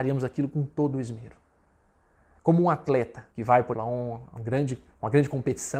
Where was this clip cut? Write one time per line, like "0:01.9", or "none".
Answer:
0:03.3
0:03.7
0:04.4